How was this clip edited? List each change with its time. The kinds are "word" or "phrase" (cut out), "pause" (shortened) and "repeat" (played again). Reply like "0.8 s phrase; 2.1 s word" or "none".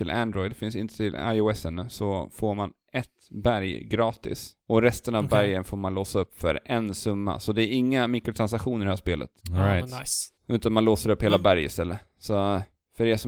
4.6 s pause; 9.4 s pause; 10.4 s pause